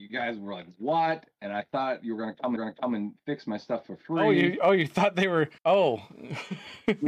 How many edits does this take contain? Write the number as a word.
two